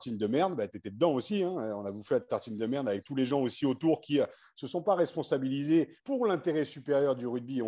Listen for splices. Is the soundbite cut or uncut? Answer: cut